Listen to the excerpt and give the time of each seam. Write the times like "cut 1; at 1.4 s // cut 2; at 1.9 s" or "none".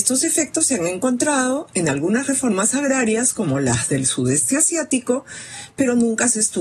none